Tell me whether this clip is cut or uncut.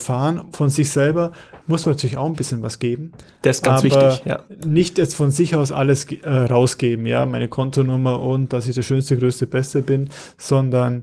cut